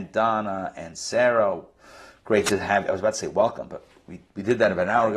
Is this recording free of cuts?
yes; 0 cuts

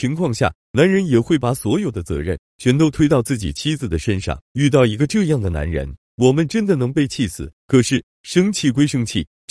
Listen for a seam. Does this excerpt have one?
yes; 2 cuts; at 4.4 s, 7.6 s

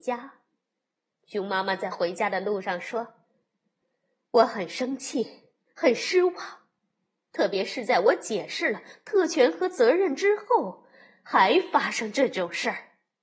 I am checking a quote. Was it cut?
no; 0 cuts

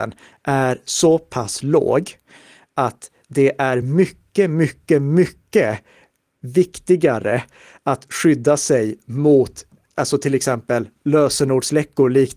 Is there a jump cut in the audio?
no; 0 cuts

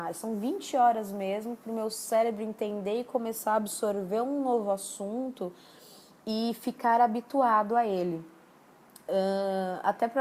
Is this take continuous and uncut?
yes; 0 cuts

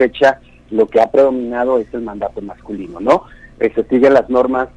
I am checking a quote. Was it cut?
no; 0 cuts

